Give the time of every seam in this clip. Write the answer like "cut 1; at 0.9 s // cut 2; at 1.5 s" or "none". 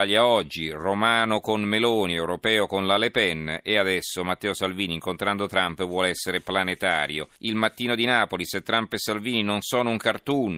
cut 1; at 7.4 s